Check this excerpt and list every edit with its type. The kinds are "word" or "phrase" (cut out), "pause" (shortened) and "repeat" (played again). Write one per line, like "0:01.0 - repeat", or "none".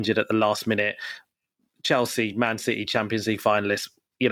none